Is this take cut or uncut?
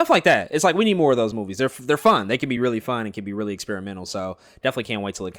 uncut